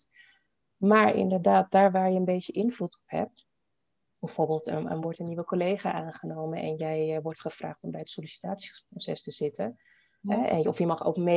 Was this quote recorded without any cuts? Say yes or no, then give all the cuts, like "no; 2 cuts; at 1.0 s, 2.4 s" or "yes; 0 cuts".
yes; 0 cuts